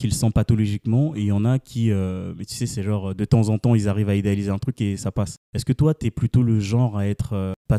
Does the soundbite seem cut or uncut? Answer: uncut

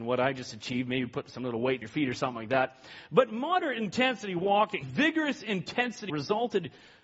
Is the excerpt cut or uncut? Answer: cut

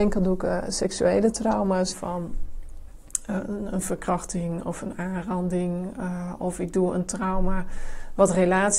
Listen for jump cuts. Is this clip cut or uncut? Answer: cut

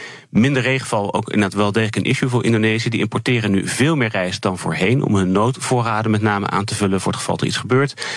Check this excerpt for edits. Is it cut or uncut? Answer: uncut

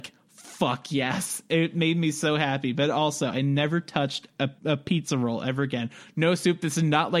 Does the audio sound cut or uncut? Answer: cut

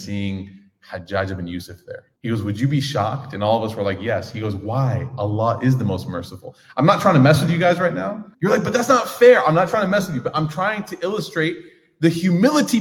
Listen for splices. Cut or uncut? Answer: cut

